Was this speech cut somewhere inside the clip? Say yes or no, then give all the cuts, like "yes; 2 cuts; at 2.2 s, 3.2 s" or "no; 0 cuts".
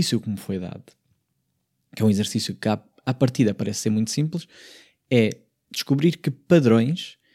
no; 0 cuts